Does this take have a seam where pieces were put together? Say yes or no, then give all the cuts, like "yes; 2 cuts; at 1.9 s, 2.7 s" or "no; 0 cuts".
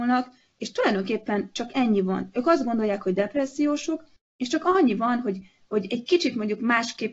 no; 0 cuts